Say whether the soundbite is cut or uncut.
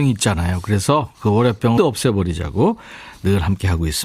cut